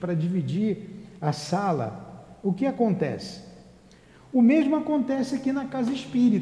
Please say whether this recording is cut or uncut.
uncut